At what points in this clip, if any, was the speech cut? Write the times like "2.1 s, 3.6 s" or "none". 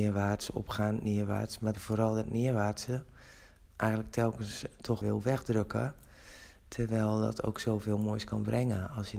1.7 s, 3.7 s, 5.0 s